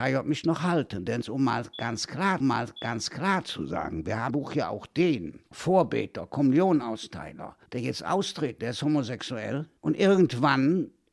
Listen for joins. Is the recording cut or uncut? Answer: cut